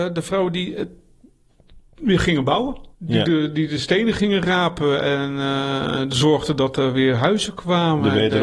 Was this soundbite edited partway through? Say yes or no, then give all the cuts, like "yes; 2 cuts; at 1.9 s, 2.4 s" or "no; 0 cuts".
yes; 1 cut; at 2.9 s